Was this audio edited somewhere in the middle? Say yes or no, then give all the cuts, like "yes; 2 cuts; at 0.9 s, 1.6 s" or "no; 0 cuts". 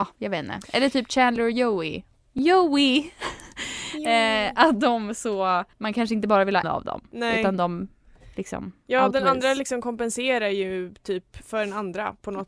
yes; 3 cuts; at 5.7 s, 6.6 s, 8.3 s